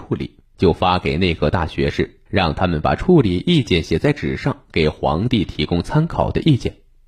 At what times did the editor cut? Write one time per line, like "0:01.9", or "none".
0:02.3

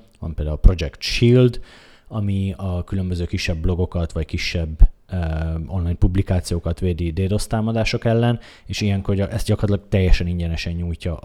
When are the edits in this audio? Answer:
none

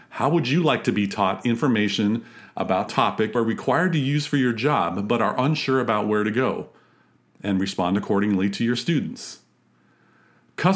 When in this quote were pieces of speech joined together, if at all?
0:02.9
0:03.3

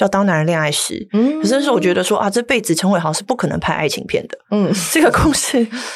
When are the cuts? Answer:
none

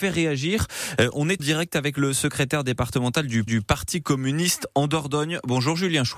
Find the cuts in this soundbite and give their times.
0:01.4
0:03.5

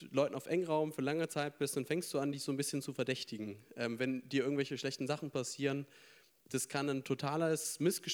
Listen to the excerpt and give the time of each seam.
none

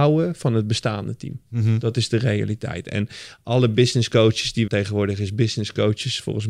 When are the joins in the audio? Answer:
0:04.7

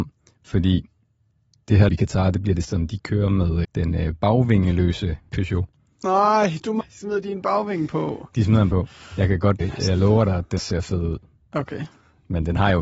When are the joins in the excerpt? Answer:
0:01.9
0:02.6
0:03.6
0:05.3
0:06.8
0:08.7
0:09.6
0:10.6

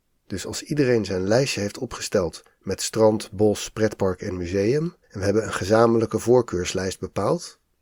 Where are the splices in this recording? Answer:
0:05.0

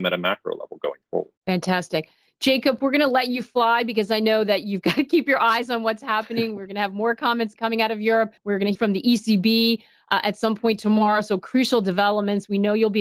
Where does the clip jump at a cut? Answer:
0:01.4
0:07.5
0:08.4
0:08.7

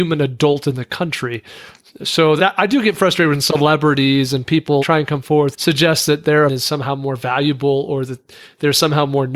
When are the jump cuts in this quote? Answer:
0:02.4
0:04.8
0:05.5
0:06.5

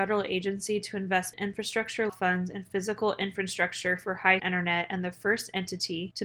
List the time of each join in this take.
0:01.3
0:02.1
0:04.4

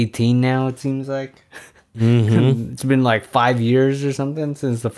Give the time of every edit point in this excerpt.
none

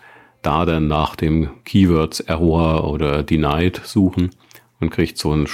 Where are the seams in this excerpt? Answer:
none

